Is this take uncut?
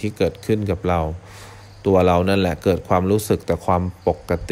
yes; 0 cuts

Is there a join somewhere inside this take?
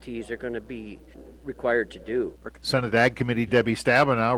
yes; 1 cut; at 3.5 s

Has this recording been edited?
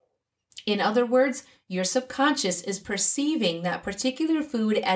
no; 0 cuts

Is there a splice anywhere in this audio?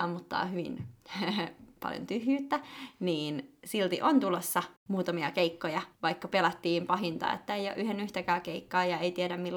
yes; 2 cuts; at 4.8 s, 5.9 s

